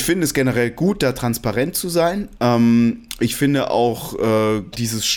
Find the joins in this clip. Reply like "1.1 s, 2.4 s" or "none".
none